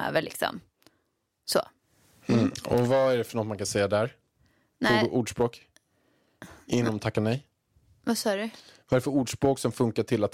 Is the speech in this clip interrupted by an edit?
no; 0 cuts

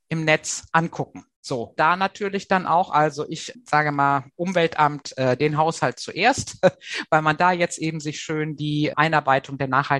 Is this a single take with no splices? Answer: no; 1 cut; at 1.8 s

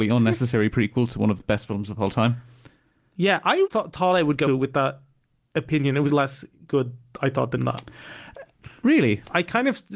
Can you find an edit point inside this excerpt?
yes; 5 cuts; at 1.4 s, 3.7 s, 4.5 s, 6.1 s, 7.6 s

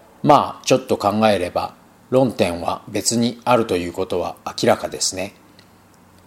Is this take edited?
no; 0 cuts

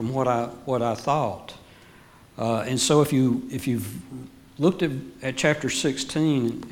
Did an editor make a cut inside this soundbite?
no; 0 cuts

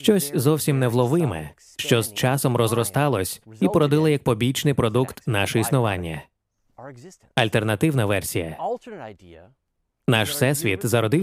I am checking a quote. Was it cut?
no; 0 cuts

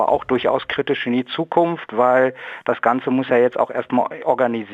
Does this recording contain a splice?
no; 0 cuts

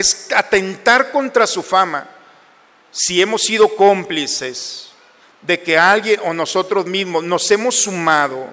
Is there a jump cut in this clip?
no; 0 cuts

